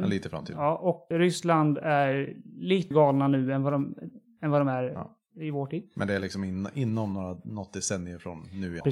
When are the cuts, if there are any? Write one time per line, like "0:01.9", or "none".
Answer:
0:01.1
0:02.9